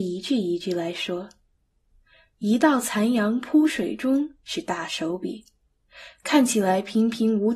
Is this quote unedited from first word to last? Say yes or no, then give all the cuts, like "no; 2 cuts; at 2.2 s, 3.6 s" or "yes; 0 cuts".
yes; 0 cuts